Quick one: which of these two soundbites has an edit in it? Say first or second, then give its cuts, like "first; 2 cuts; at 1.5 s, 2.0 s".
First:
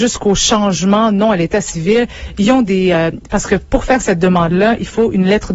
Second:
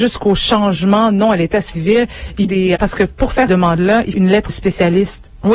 second; 5 cuts; at 2.4 s, 2.8 s, 3.5 s, 4.1 s, 4.5 s